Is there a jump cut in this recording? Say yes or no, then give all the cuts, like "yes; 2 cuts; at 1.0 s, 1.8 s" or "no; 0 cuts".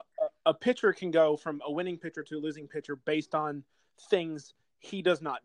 no; 0 cuts